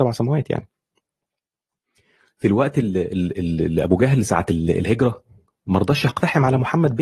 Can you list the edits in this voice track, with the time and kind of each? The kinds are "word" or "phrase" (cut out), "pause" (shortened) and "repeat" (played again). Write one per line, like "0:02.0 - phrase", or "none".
none